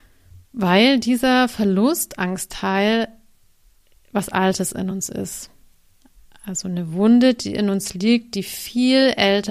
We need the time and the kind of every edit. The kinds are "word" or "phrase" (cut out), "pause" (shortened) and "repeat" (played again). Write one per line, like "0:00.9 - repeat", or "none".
none